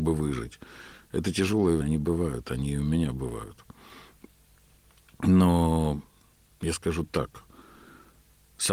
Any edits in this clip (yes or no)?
yes